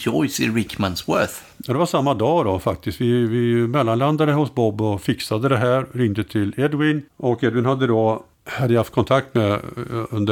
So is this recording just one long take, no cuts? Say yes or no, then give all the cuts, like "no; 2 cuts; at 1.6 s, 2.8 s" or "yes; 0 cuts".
no; 3 cuts; at 1.5 s, 7.1 s, 8.3 s